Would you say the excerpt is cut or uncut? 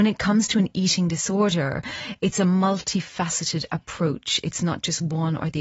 uncut